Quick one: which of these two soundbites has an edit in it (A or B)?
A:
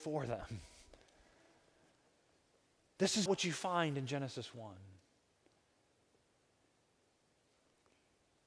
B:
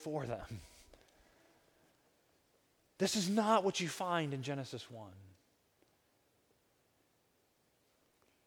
A